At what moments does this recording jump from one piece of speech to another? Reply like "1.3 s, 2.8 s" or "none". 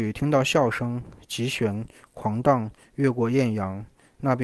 none